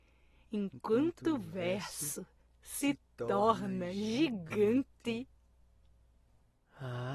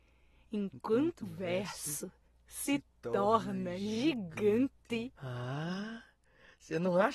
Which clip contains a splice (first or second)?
second